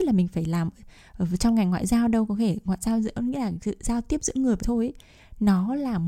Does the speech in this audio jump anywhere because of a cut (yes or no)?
yes